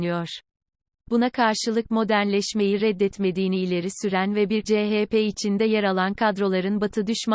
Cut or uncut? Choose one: cut